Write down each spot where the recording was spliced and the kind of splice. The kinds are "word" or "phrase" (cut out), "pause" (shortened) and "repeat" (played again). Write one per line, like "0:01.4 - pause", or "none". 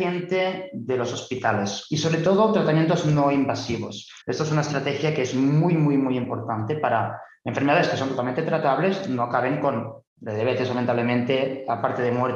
0:04.2 - pause
0:10.1 - pause